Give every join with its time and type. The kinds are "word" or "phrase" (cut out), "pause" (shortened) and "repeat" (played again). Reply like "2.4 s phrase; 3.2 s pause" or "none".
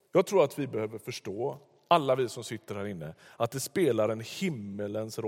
none